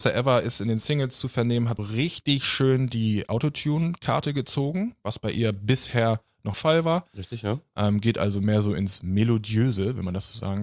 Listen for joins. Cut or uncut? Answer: cut